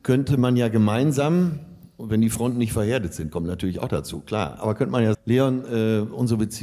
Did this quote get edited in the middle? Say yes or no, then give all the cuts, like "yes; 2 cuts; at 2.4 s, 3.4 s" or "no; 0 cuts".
yes; 1 cut; at 5.1 s